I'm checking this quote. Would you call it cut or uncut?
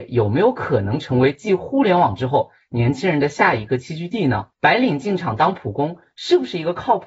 cut